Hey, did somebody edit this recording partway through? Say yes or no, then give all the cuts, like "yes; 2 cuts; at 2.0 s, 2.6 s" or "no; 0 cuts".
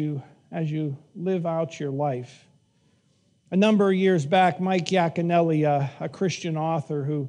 no; 0 cuts